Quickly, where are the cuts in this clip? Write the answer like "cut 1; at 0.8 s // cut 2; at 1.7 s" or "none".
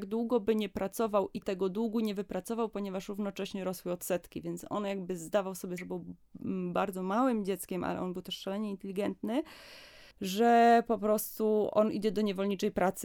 cut 1; at 1.4 s // cut 2; at 5.8 s // cut 3; at 10.1 s